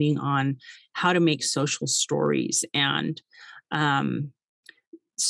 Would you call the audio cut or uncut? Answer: uncut